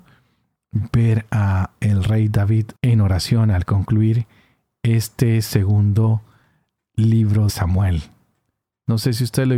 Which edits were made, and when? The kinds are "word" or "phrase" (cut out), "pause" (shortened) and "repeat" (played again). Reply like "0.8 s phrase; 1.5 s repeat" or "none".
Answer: 2.7 s word; 7.5 s word